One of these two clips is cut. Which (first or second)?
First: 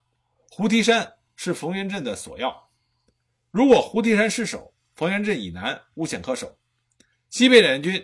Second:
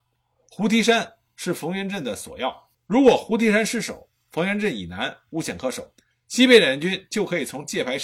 second